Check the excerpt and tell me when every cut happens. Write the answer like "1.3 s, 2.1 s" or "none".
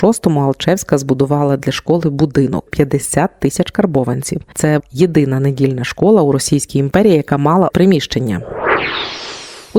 2.7 s, 4.8 s, 7.7 s